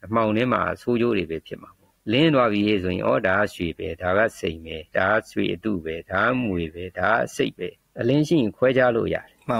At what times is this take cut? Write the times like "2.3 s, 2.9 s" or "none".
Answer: 2.0 s, 7.8 s